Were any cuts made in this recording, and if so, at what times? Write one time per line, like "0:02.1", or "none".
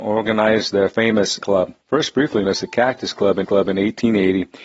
0:01.4
0:01.8
0:02.4
0:03.4